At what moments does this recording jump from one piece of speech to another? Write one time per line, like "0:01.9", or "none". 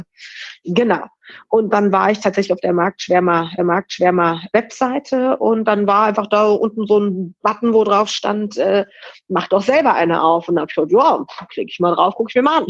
0:03.6